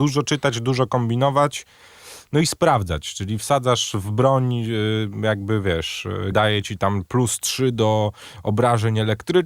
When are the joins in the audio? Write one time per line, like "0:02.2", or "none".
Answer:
0:06.3